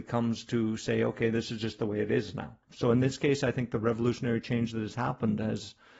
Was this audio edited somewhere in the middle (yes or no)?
yes